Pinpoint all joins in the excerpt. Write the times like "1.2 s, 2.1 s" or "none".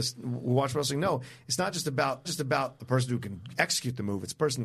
2.2 s